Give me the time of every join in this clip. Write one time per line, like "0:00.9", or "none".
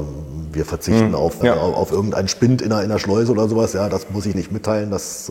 0:01.4
0:04.3